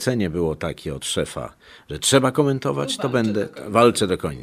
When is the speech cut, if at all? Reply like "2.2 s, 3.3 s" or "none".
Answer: none